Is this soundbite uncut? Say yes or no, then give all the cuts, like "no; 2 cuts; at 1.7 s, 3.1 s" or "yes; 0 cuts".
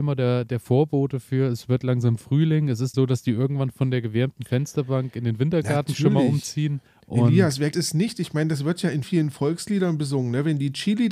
no; 4 cuts; at 2.9 s, 6.9 s, 7.7 s, 9.0 s